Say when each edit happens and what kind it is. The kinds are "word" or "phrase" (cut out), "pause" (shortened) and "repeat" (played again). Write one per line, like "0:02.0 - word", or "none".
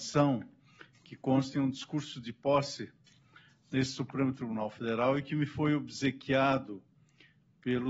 none